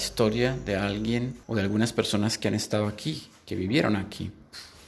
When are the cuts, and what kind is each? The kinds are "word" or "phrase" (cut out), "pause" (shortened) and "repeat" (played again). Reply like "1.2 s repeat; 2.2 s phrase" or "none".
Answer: 1.4 s pause